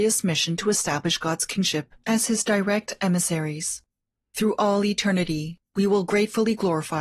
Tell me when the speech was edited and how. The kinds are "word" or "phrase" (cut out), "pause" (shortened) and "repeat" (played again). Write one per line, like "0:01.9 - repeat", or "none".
none